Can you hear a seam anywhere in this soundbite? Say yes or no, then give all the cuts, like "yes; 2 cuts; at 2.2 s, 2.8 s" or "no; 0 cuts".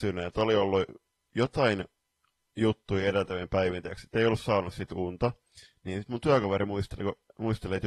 no; 0 cuts